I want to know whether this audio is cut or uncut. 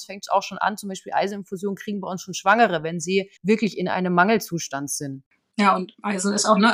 cut